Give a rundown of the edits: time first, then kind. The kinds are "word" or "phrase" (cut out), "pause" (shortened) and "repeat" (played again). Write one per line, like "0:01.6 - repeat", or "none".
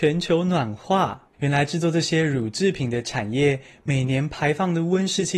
0:01.3 - pause

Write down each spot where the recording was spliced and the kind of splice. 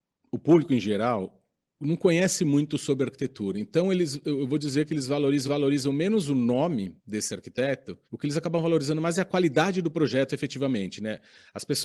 0:05.4 - repeat
0:07.0 - pause
0:08.0 - pause

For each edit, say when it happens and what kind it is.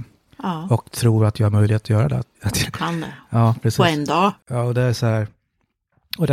0:02.3 - pause
0:04.4 - pause

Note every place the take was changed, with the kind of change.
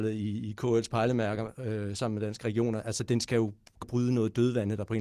0:03.8 - word

